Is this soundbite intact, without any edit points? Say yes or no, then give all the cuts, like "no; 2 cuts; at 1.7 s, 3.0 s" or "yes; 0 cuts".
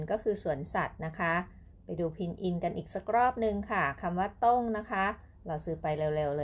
no; 1 cut; at 5.3 s